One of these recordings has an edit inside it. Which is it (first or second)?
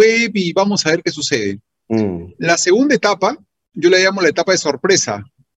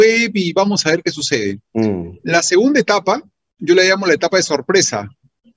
second